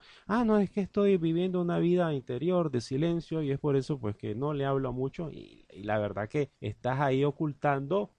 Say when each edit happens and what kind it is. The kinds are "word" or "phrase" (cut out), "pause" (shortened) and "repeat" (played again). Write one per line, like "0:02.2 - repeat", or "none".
0:06.5 - pause